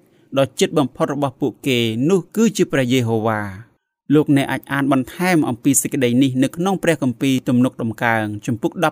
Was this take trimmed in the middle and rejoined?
no; 0 cuts

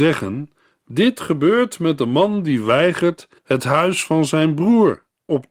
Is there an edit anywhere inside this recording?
yes; 1 cut; at 3.4 s

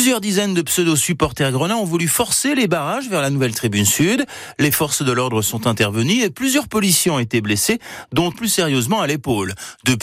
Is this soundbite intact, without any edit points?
no; 1 cut; at 8.3 s

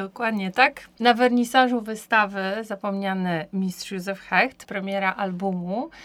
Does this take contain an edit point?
no; 0 cuts

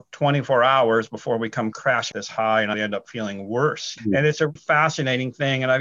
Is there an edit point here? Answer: yes; 4 cuts; at 2.1 s, 2.7 s, 4.0 s, 4.6 s

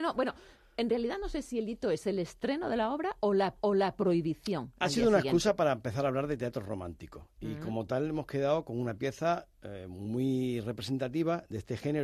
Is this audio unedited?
no; 1 cut; at 3.6 s

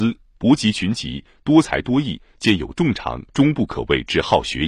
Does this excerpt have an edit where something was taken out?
yes; 1 cut; at 3.3 s

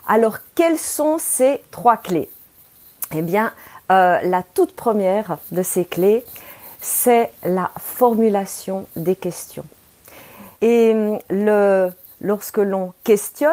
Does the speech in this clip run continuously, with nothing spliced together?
no; 1 cut; at 10.5 s

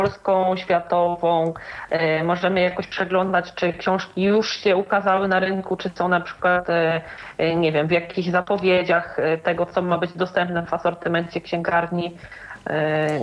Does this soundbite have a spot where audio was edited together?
no; 0 cuts

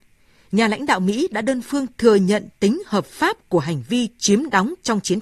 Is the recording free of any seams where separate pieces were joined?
yes; 0 cuts

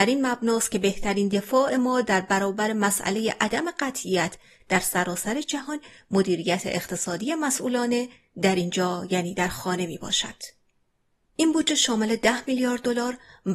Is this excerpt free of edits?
yes; 0 cuts

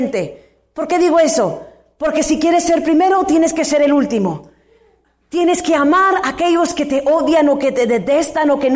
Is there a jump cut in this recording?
no; 0 cuts

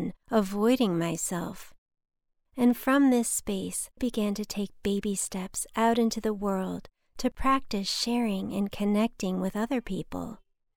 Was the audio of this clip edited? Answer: yes; 1 cut; at 4.0 s

